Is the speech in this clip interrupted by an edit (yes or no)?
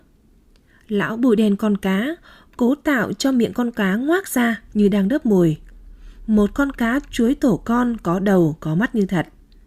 no